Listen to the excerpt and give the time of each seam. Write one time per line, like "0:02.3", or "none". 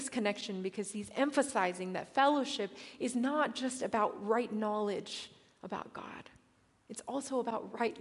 none